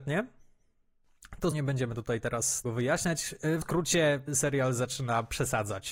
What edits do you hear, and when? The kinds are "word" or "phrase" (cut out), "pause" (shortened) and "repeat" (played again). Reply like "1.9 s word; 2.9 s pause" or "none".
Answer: 1.5 s word; 2.6 s word; 3.6 s word; 4.3 s word